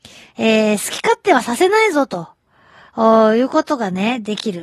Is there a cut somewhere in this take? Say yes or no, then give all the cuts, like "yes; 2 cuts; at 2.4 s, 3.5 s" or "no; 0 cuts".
no; 0 cuts